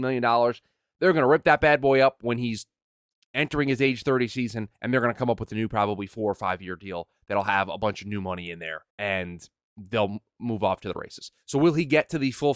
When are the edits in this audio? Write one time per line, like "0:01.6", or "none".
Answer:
0:04.7
0:08.9